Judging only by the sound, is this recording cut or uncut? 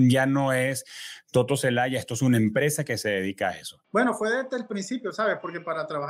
cut